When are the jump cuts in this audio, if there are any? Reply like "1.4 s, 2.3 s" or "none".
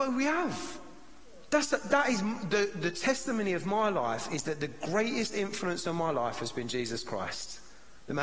none